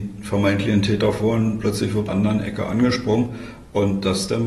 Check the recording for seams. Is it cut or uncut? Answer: cut